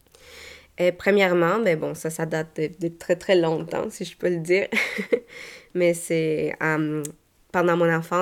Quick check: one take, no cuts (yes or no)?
yes